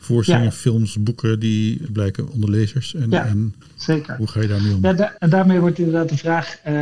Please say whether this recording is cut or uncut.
cut